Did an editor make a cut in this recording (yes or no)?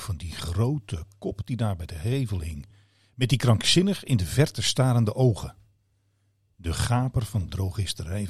no